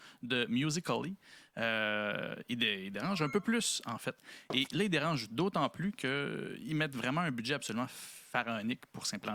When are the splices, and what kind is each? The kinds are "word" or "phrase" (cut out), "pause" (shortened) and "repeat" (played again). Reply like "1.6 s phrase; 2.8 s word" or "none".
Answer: none